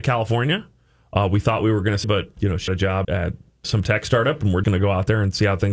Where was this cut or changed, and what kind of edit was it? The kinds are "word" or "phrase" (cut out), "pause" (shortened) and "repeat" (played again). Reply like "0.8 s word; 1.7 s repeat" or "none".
2.0 s word; 2.4 s word; 2.7 s word; 3.0 s word; 3.6 s word; 4.6 s word